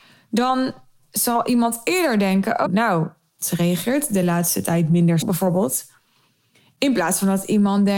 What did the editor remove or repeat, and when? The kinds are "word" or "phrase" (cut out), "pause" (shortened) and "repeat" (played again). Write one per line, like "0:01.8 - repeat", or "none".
0:02.6 - word
0:05.2 - word